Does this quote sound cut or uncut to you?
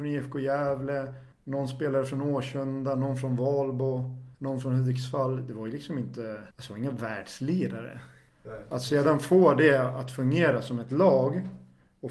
cut